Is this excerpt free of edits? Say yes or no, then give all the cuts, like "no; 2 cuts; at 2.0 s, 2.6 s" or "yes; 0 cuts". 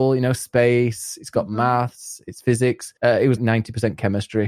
no; 2 cuts; at 3.0 s, 3.4 s